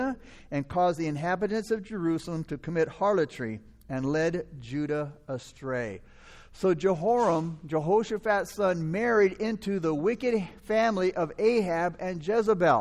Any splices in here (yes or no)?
no